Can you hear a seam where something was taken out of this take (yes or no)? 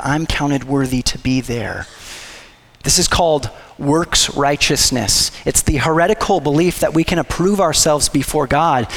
no